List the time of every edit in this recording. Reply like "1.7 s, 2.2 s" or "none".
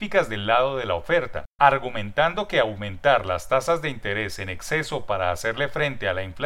none